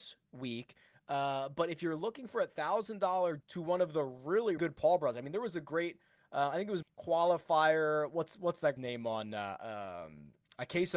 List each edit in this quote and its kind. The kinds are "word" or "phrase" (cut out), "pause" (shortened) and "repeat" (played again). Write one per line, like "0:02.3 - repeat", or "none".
0:03.4 - word
0:04.6 - word
0:06.8 - word
0:08.8 - word